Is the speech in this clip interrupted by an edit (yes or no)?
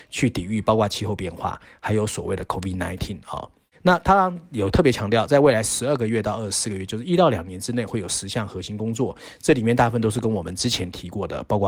no